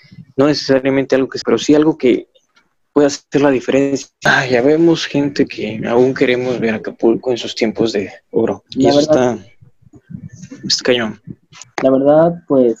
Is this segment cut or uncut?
cut